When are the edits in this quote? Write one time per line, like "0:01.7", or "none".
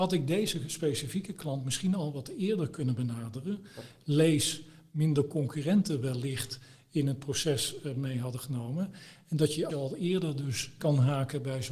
0:09.7
0:10.8